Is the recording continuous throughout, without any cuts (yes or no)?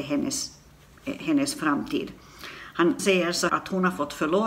no